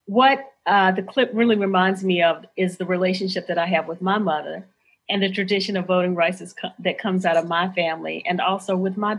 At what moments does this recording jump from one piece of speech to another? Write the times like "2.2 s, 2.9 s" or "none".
none